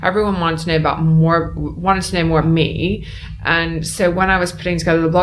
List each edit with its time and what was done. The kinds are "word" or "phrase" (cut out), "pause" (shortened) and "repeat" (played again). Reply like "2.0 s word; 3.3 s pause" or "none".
2.4 s word